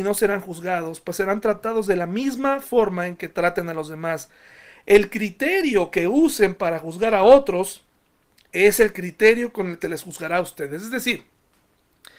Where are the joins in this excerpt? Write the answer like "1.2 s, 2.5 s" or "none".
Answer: 9.8 s